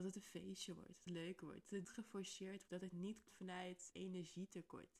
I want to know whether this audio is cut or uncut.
cut